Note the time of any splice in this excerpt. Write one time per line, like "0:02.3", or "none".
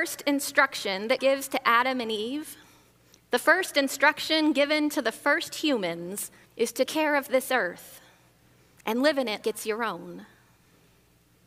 0:01.2
0:06.5
0:06.9
0:09.4